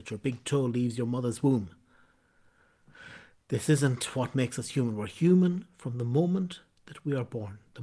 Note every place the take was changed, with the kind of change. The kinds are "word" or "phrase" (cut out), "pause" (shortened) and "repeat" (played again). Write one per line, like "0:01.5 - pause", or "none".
none